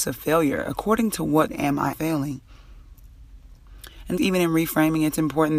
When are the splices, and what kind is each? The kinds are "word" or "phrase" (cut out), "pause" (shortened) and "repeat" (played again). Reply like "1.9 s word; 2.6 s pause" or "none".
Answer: 1.5 s word; 1.9 s word; 4.2 s word